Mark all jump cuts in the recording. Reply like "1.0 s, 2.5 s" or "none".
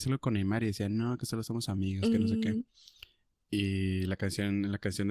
none